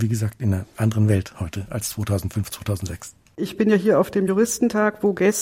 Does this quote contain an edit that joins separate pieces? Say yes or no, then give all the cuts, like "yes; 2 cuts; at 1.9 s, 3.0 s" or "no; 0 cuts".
no; 0 cuts